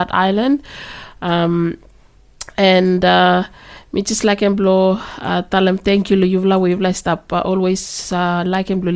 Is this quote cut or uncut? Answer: uncut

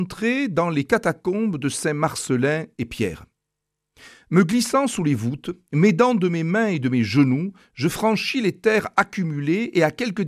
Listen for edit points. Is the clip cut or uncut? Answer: uncut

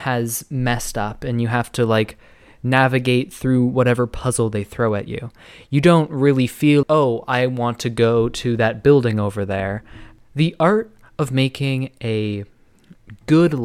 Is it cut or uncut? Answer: cut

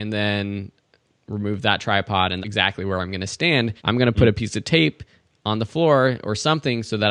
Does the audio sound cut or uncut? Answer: cut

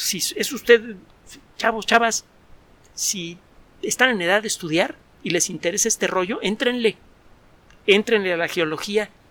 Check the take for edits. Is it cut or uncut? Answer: uncut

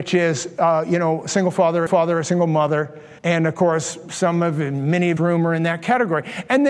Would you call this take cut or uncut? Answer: cut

